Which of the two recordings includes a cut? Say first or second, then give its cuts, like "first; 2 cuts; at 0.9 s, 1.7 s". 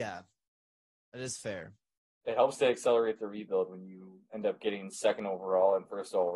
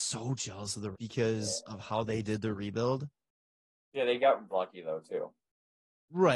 second; 2 cuts; at 0.9 s, 4.5 s